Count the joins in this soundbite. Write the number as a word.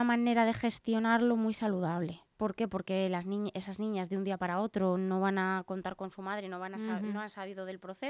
one